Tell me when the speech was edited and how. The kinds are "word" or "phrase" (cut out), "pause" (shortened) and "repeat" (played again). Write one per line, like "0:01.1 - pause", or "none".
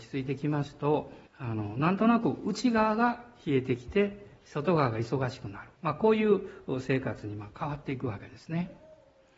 0:01.3 - pause
0:05.7 - pause